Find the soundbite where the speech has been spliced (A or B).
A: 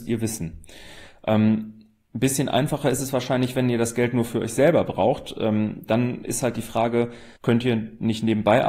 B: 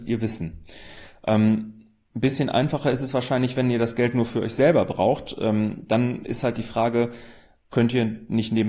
A